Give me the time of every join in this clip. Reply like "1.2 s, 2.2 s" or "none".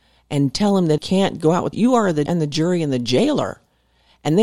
1.0 s, 1.7 s, 2.3 s